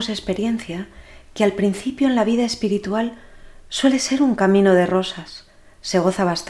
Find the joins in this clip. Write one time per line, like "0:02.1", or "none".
none